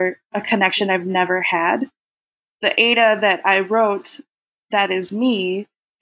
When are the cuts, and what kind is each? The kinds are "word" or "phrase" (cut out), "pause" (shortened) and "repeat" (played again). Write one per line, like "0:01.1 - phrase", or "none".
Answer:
none

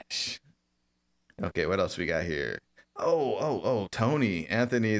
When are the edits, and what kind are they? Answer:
none

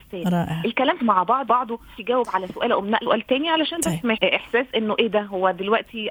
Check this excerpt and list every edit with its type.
0:01.0 - word
0:01.5 - word
0:02.0 - word
0:03.0 - word
0:04.1 - word

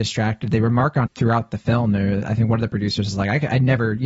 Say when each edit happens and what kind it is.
0:01.1 - word

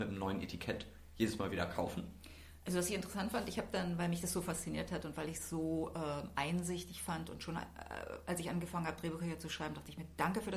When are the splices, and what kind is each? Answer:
none

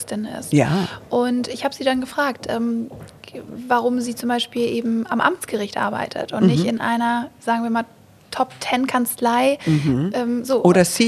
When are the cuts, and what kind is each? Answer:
none

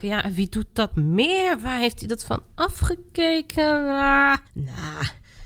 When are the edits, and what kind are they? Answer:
0:00.9 - word
0:04.5 - pause

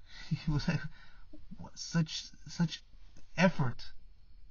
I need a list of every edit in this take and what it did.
none

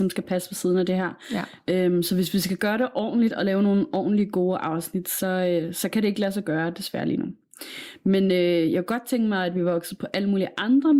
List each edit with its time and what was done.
none

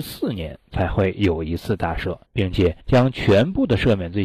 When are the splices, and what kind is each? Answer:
0:02.2 - pause
0:02.8 - pause

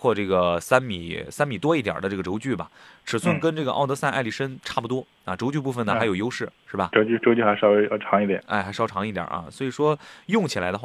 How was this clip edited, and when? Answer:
0:05.2 - pause
0:08.4 - phrase

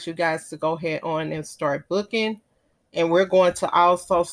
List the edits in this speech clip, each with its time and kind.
none

